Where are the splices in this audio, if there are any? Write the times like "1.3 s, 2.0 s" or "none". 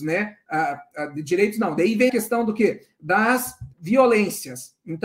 2.1 s, 3.7 s